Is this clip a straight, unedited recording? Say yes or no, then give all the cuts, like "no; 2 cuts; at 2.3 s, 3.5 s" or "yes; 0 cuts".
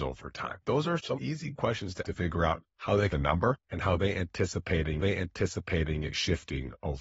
no; 6 cuts; at 1.1 s, 2.0 s, 2.7 s, 3.1 s, 3.6 s, 5.0 s